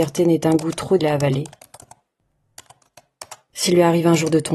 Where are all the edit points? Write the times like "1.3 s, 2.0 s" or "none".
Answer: 1.0 s